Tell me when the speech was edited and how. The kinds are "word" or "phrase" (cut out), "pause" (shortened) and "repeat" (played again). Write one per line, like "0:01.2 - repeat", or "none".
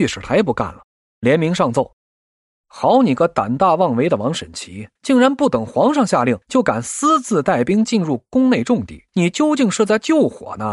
0:02.0 - pause
0:05.0 - pause
0:06.4 - pause
0:09.1 - pause